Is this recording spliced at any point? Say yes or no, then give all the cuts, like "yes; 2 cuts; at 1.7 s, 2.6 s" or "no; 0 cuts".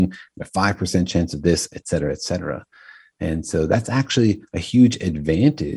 no; 0 cuts